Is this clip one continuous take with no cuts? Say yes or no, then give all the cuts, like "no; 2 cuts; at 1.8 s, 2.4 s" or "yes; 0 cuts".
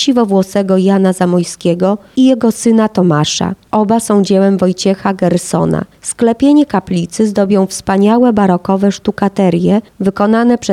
yes; 0 cuts